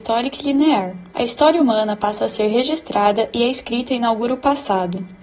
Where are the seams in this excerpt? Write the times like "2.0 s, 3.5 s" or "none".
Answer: 1.1 s